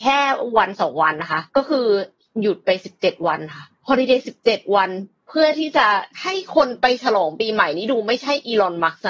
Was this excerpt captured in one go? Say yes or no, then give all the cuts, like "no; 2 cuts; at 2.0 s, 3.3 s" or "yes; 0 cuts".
no; 3 cuts; at 1.5 s, 3.7 s, 6.1 s